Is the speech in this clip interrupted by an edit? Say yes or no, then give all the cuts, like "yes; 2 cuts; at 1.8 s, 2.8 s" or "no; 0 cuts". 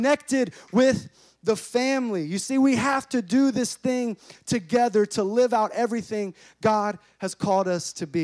no; 0 cuts